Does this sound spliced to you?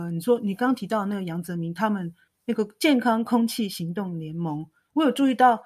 yes; 1 cut; at 2.3 s

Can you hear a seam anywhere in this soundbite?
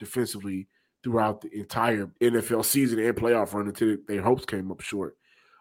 yes; 1 cut; at 2.2 s

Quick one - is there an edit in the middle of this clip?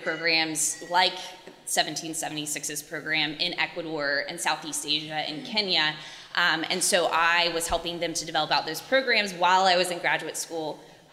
no; 0 cuts

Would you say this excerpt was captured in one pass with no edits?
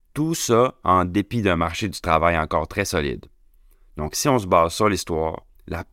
yes; 0 cuts

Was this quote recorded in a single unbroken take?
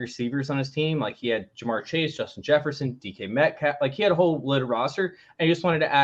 yes; 0 cuts

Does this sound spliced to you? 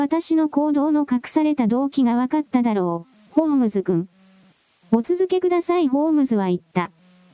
no; 0 cuts

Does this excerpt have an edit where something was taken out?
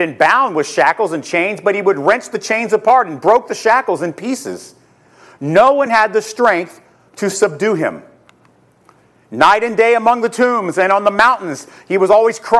no; 0 cuts

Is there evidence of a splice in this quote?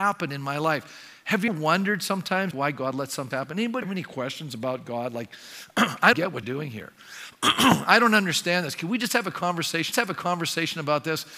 yes; 7 cuts; at 1.5 s, 2.5 s, 3.3 s, 3.8 s, 6.1 s, 6.4 s, 9.9 s

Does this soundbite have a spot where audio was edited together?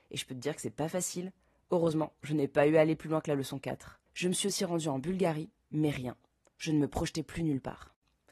yes; 1 cut; at 4.1 s

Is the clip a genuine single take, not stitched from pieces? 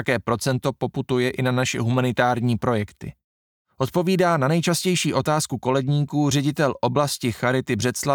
yes; 0 cuts

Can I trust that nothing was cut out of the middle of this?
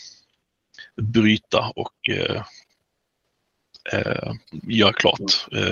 no; 1 cut; at 4.4 s

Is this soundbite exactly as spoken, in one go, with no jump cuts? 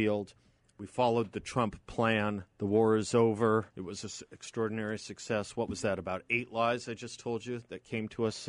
no; 2 cuts; at 2.5 s, 3.7 s

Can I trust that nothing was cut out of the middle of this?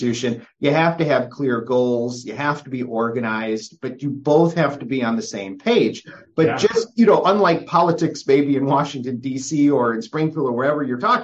yes; 0 cuts

